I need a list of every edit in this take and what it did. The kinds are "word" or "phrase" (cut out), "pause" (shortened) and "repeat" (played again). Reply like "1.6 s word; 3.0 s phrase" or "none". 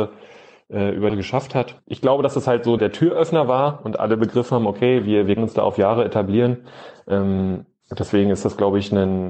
1.1 s phrase; 2.8 s word; 5.4 s phrase

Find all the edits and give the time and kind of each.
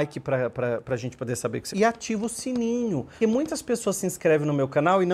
1.7 s word; 3.2 s word

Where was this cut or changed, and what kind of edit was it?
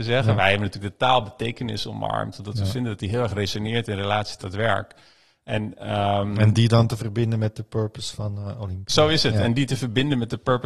none

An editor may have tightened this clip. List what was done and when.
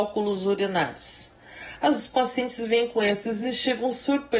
2.0 s word; 3.4 s word

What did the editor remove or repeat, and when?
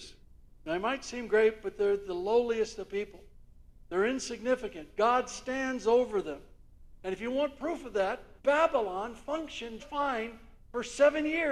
8.4 s pause; 9.8 s word

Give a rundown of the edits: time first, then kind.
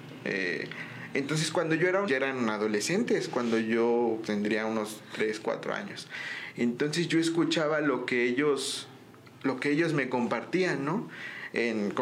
2.1 s phrase; 4.2 s word

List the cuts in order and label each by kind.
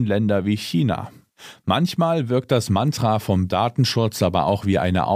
3.5 s word

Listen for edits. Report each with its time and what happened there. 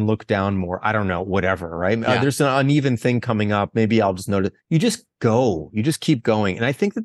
4.6 s pause

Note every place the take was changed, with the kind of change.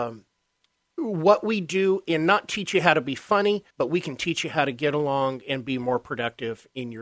3.7 s pause

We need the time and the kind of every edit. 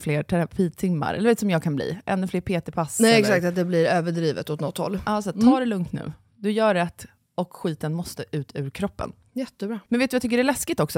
none

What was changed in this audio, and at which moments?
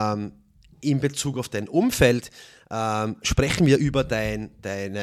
none

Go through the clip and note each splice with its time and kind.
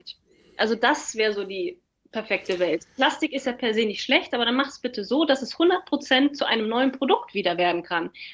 none

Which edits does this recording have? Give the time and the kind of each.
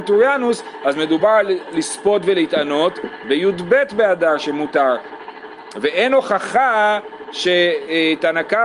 none

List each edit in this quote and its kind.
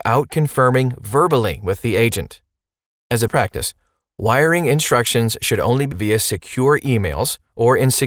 3.3 s word; 5.9 s word

